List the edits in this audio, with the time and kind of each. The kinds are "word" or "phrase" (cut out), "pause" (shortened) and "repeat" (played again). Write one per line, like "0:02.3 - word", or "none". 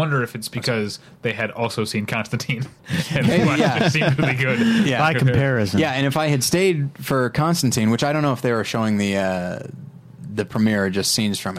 0:02.8 - pause